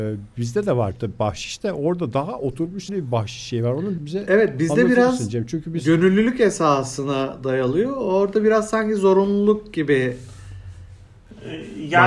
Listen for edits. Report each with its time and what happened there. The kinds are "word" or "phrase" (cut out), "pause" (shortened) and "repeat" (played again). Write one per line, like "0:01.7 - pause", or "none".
0:02.9 - word
0:04.0 - word

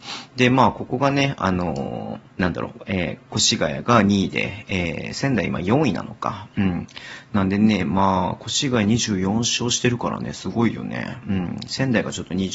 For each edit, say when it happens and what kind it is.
0:02.3 - pause

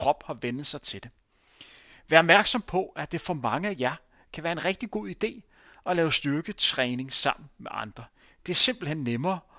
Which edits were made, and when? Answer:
none

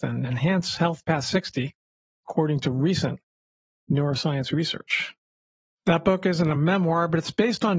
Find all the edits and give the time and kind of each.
none

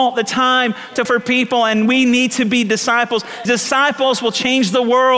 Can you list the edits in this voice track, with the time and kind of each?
0:01.0 - word
0:03.4 - word

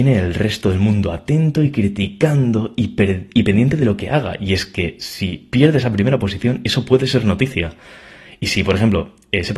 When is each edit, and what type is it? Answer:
none

